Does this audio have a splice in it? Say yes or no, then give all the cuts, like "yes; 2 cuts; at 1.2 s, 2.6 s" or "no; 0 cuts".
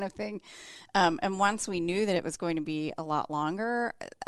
no; 0 cuts